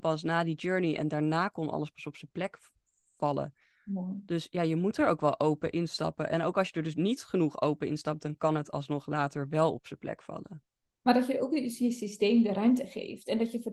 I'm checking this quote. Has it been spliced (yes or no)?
no